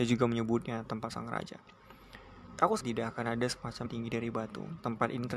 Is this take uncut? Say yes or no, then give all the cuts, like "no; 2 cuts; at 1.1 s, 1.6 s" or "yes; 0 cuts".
no; 2 cuts; at 2.8 s, 3.9 s